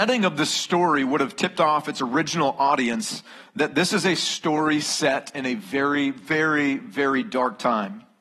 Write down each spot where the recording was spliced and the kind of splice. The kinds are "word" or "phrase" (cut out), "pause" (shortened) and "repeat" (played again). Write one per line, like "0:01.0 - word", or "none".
none

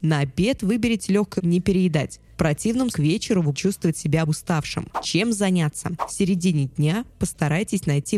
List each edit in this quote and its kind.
0:01.4 - phrase
0:02.9 - word
0:03.5 - word
0:04.3 - word

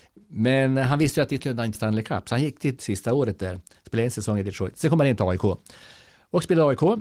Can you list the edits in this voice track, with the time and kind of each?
0:01.4 - word
0:01.7 - word
0:02.8 - word

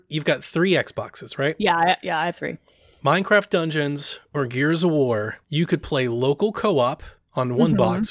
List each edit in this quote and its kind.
0:05.4 - pause

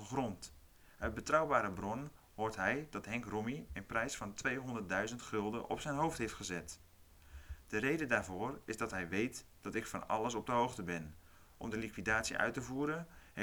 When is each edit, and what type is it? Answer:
none

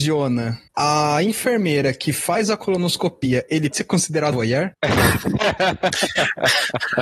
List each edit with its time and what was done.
0:03.7 - word
0:04.3 - word

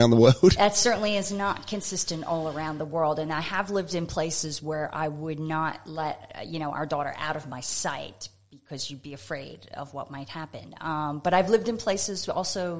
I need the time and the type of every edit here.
none

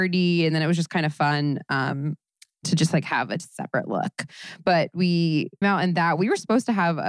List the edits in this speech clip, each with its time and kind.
0:05.6 - word

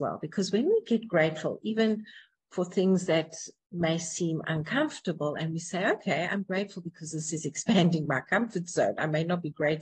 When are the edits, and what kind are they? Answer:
none

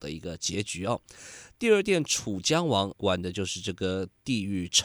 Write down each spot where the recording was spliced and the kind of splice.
0:02.9 - word

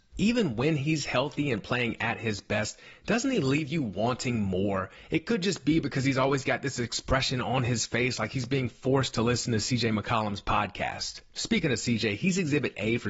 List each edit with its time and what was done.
none

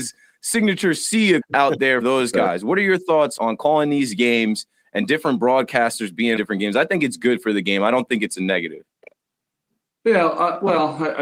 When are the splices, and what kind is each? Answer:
0:01.4 - word
0:02.0 - word
0:03.4 - word
0:06.4 - word

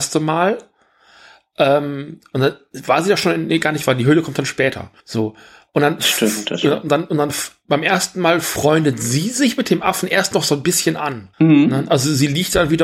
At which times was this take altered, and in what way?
0:05.0 - pause
0:11.3 - pause

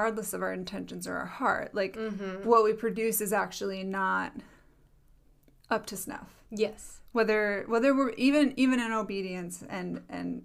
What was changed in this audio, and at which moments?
none

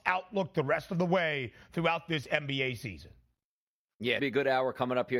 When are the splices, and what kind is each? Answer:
0:04.2 - phrase

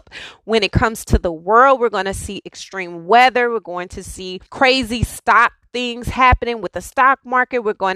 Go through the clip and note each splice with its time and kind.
0:04.5 - pause

